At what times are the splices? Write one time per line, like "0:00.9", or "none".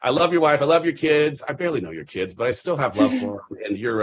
none